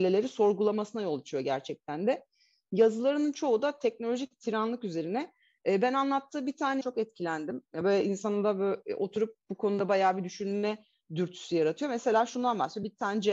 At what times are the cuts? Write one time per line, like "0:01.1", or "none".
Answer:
0:06.8